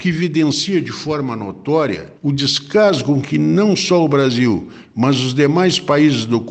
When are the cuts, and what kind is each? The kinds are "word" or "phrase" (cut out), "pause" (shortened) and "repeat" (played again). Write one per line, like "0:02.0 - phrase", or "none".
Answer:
0:02.2 - pause